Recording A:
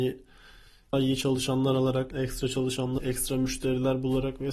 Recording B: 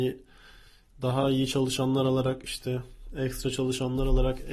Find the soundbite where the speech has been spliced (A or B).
A